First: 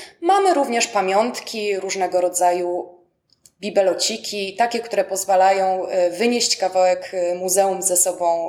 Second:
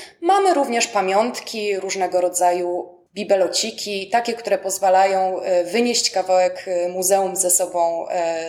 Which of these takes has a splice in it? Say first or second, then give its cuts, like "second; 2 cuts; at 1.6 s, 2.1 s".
second; 1 cut; at 3.1 s